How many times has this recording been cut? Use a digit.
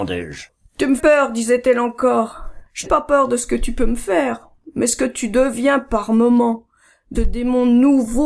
3